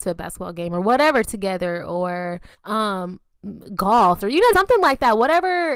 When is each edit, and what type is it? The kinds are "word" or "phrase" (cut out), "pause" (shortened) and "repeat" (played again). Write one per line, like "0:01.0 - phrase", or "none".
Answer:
0:02.6 - pause
0:04.2 - phrase
0:04.5 - word